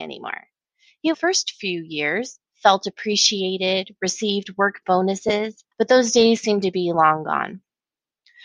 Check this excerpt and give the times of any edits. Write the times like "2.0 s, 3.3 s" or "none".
1.1 s, 5.7 s